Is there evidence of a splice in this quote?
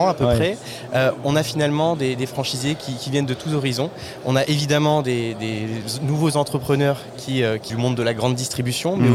yes; 1 cut; at 7.7 s

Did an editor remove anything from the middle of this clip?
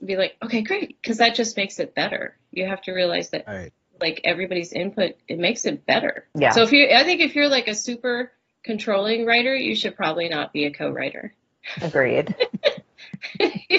yes; 1 cut; at 6.3 s

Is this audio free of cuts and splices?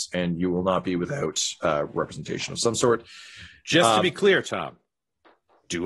yes; 0 cuts

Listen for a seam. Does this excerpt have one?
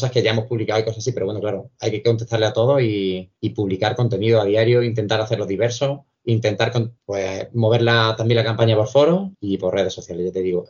yes; 4 cuts; at 3.4 s, 6.1 s, 7.0 s, 9.3 s

